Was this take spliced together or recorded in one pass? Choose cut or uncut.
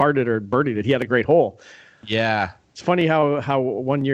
uncut